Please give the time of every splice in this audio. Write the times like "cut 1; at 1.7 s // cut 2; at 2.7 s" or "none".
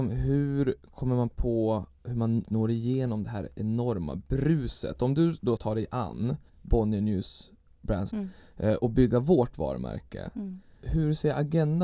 cut 1; at 2.5 s // cut 2; at 5.6 s // cut 3; at 6.5 s // cut 4; at 8.1 s